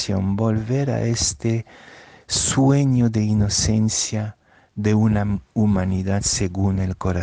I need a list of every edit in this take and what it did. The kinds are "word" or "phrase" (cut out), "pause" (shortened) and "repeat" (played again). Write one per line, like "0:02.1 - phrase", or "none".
none